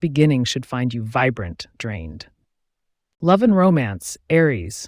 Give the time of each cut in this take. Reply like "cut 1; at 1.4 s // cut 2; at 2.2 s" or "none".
cut 1; at 1.7 s